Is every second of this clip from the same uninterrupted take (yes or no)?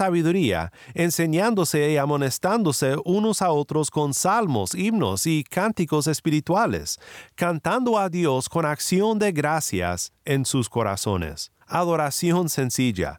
no